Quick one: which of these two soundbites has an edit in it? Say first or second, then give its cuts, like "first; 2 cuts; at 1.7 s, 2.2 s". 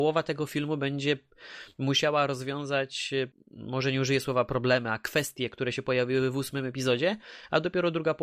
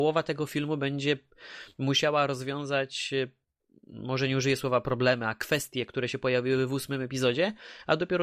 first; 1 cut; at 3.3 s